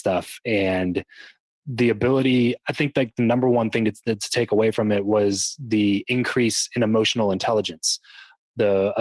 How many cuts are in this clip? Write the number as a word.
zero